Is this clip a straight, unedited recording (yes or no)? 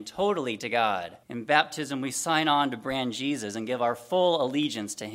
no